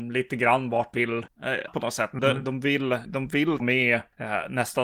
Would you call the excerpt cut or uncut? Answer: cut